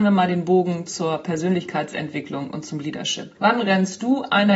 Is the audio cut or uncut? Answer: cut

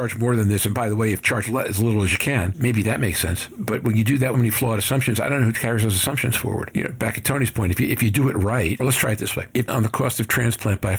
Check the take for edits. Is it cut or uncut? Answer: cut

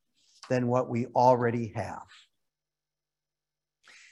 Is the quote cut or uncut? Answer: uncut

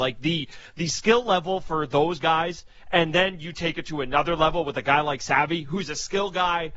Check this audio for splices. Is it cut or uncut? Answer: uncut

